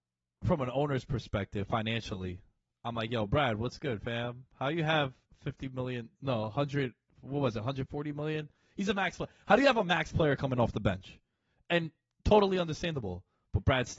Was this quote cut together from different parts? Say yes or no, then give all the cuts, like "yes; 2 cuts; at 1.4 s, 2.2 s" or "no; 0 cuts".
no; 0 cuts